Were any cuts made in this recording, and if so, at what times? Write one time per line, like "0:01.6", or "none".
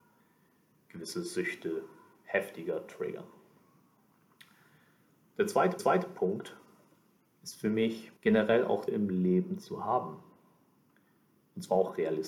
0:05.8
0:08.2
0:08.9